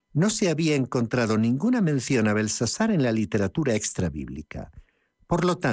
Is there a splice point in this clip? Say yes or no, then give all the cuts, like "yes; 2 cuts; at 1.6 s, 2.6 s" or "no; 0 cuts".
no; 0 cuts